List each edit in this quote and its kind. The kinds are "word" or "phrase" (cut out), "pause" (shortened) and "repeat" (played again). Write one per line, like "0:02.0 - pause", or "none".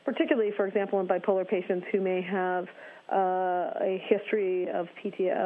none